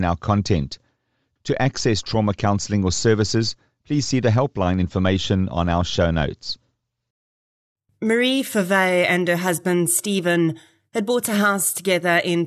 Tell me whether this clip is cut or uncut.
uncut